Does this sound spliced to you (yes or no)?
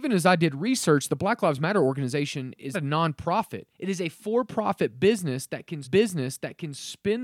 yes